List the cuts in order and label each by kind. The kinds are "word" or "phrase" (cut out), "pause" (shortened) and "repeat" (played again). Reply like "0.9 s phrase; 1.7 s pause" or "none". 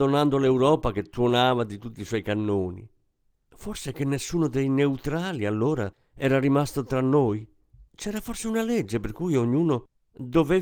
none

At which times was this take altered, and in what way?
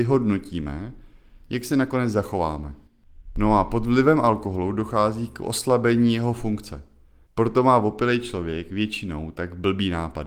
none

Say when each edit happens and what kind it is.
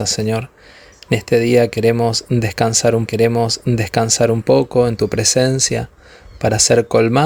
3.1 s repeat

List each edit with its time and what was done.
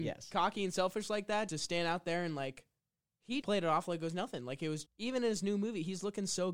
1.5 s word; 3.4 s word; 4.9 s word

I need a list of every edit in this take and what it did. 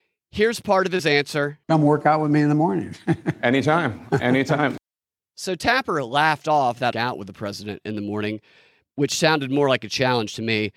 1.6 s pause; 6.9 s phrase

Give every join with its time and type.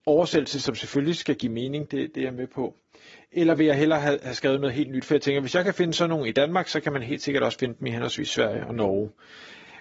none

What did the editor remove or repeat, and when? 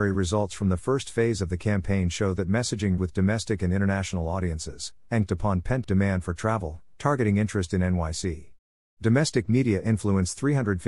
3.0 s word; 5.3 s word; 5.8 s word

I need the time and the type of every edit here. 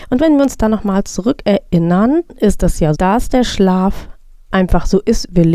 2.3 s word; 2.9 s word; 4.5 s word

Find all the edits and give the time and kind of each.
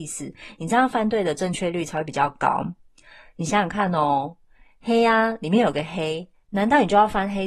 none

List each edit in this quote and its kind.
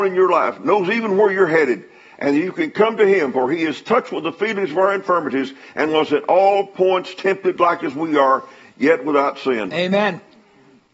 none

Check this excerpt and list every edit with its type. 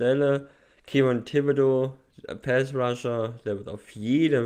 none

